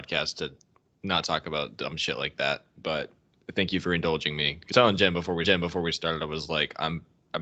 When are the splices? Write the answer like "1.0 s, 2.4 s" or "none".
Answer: 4.7 s, 5.4 s